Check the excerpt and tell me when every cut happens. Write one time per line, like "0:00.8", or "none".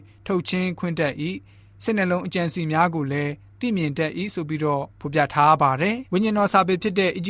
0:04.9
0:06.1